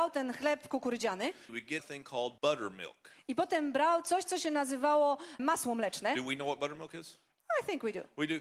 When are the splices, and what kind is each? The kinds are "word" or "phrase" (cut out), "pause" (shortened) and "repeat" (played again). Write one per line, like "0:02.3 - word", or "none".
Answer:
0:01.5 - word
0:01.8 - word
0:02.4 - pause
0:05.4 - word